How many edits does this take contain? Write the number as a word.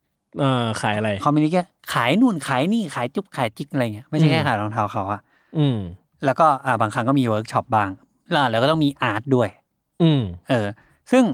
zero